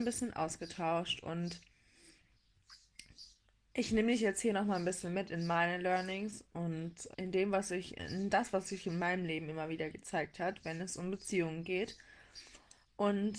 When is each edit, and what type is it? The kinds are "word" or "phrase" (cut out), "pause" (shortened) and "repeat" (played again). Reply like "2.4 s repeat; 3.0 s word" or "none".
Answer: 7.1 s word